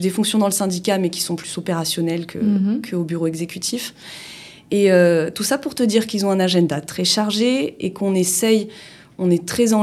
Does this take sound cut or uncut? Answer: uncut